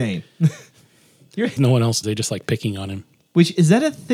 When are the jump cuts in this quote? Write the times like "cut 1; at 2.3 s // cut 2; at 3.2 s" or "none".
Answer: cut 1; at 1.6 s // cut 2; at 2.0 s